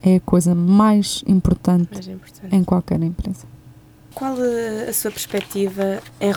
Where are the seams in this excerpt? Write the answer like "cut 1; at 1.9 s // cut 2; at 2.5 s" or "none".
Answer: none